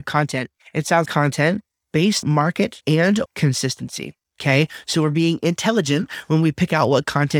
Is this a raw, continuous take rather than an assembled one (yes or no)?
no